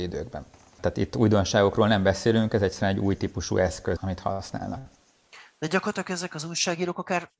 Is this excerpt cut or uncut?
cut